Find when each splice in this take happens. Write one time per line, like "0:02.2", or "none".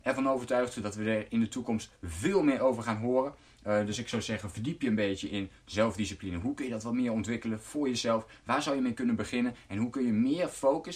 none